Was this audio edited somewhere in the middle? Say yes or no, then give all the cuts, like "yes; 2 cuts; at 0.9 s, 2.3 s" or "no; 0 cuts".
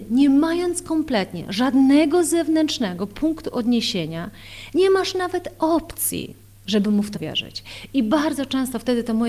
yes; 1 cut; at 7.1 s